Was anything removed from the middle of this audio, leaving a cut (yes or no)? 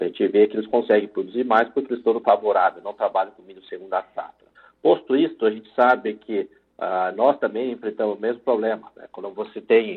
yes